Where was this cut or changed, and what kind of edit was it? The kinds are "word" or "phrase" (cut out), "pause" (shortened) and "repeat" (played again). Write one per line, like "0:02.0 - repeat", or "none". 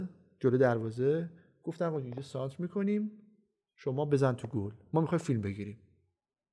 none